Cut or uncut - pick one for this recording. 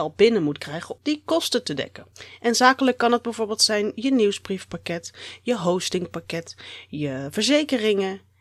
cut